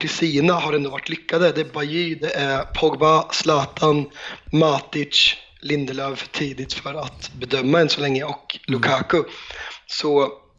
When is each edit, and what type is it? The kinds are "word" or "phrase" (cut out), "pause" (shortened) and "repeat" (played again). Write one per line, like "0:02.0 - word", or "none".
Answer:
none